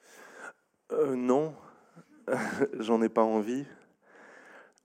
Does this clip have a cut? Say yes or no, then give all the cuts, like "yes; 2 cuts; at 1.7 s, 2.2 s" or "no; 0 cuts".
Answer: no; 0 cuts